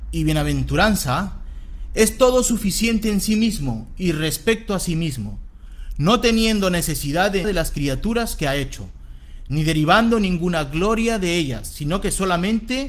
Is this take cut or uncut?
cut